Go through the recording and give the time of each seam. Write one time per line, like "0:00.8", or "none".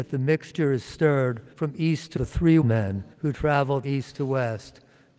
0:01.5
0:02.2
0:02.6
0:03.1
0:03.8